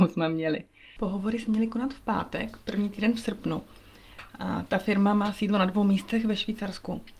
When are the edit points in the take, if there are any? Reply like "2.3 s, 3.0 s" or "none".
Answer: none